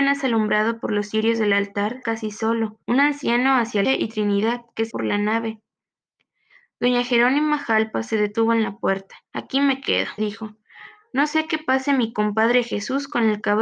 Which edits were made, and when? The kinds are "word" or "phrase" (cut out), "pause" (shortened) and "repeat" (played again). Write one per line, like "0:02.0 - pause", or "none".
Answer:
0:02.0 - phrase
0:02.8 - pause
0:03.8 - phrase
0:04.9 - word
0:09.3 - pause
0:10.2 - word